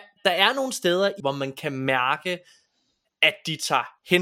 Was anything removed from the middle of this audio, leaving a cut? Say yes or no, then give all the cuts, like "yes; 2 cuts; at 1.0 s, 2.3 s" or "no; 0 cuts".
yes; 1 cut; at 1.2 s